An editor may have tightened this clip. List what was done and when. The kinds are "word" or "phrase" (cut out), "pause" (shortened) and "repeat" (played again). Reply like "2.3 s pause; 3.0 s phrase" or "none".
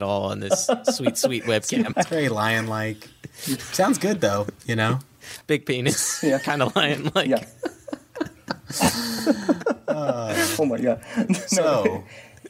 1.9 s word; 4.6 s pause; 5.4 s pause